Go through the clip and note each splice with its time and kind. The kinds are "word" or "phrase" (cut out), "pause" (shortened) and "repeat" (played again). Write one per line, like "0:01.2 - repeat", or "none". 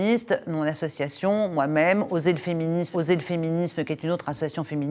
0:02.9 - repeat